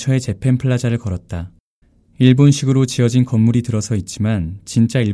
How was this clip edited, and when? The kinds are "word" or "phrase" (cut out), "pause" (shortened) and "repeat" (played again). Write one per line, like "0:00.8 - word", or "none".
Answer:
0:01.8 - pause